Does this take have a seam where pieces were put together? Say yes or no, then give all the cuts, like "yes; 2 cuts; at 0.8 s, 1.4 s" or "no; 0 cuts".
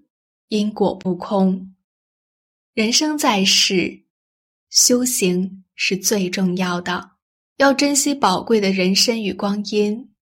yes; 1 cut; at 7.3 s